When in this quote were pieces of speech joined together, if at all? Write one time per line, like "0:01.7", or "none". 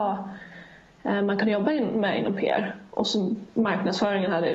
none

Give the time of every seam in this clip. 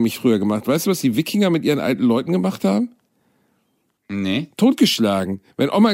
none

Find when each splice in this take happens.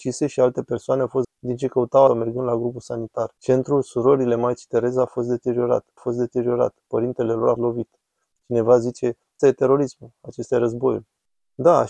0:01.2
0:02.1
0:03.4
0:06.0
0:07.6
0:09.4

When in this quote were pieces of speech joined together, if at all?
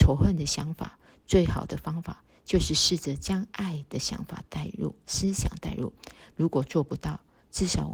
none

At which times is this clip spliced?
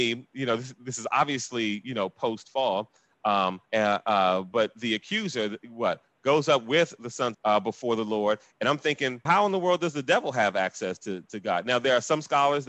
0:03.6
0:07.3
0:09.3
0:11.2

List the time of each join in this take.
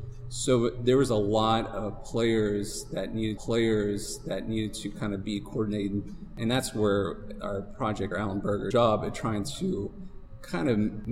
0:03.4
0:08.1
0:08.7

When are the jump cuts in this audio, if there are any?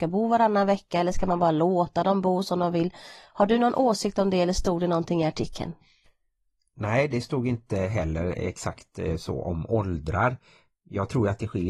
none

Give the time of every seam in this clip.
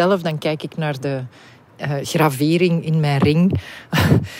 none

